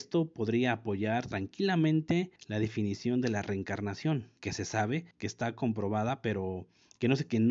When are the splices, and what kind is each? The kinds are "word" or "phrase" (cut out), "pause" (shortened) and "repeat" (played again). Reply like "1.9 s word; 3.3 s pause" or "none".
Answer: 2.4 s pause; 4.4 s pause; 5.1 s pause